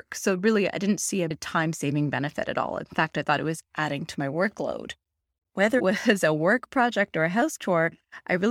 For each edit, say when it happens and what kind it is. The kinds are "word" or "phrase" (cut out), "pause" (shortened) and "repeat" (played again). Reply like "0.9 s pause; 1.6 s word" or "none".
5.8 s word